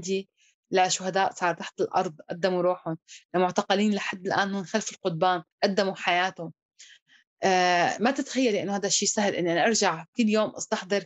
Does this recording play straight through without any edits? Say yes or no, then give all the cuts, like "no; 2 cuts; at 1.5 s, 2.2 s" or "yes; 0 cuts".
no; 1 cut; at 5.5 s